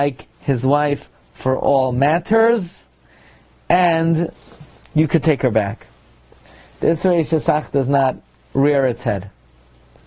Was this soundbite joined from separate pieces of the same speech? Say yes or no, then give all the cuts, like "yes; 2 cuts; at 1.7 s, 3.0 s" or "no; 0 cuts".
no; 0 cuts